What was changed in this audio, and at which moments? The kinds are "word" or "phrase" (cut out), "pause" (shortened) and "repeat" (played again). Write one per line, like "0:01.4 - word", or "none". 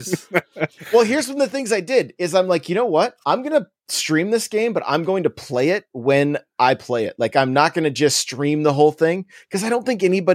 none